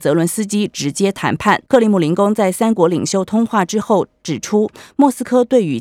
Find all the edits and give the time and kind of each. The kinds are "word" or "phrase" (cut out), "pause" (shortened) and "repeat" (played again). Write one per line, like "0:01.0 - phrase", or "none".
0:01.7 - pause